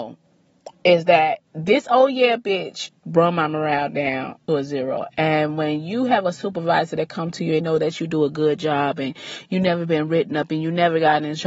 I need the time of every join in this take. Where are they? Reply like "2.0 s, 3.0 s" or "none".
1.5 s, 3.0 s, 4.5 s, 7.6 s